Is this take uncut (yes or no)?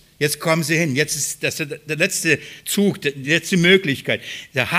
yes